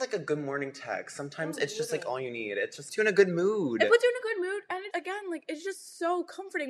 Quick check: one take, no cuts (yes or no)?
no